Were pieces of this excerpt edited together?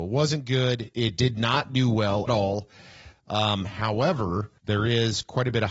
yes; 2 cuts; at 2.3 s, 4.6 s

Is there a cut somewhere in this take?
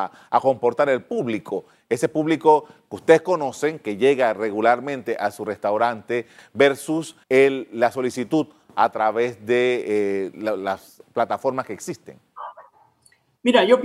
yes; 2 cuts; at 7.2 s, 10.3 s

